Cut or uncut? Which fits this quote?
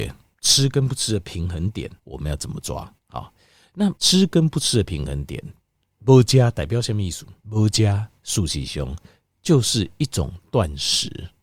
cut